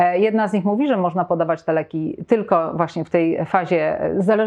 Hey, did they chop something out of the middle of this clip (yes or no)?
no